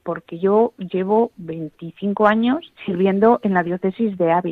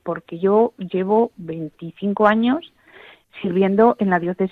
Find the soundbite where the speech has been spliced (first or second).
first